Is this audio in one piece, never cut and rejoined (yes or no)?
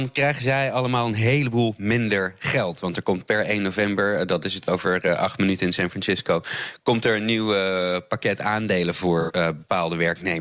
yes